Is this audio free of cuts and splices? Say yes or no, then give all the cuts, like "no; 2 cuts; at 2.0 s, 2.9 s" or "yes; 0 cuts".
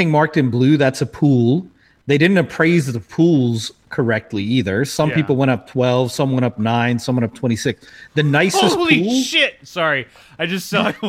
yes; 0 cuts